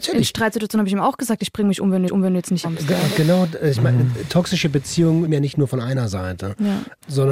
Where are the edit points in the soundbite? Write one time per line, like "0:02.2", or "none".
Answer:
0:02.1
0:02.6
0:05.3